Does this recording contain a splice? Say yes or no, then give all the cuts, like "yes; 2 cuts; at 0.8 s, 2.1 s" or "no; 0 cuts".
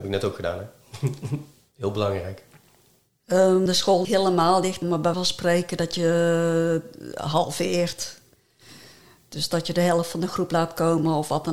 yes; 4 cuts; at 3.7 s, 4.0 s, 4.8 s, 5.1 s